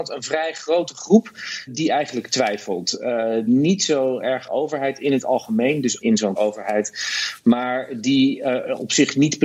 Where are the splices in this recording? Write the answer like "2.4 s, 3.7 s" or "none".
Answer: 1.7 s, 3.5 s, 4.5 s, 6.0 s, 6.4 s